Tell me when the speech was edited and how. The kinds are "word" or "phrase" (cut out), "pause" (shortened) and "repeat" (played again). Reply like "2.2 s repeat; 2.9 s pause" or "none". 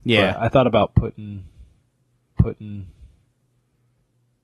2.4 s repeat